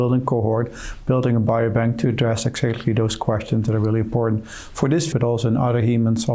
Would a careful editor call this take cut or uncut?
cut